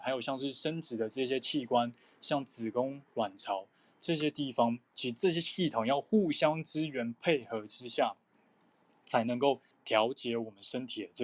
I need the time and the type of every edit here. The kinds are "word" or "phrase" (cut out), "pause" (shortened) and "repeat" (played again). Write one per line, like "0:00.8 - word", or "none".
0:09.7 - pause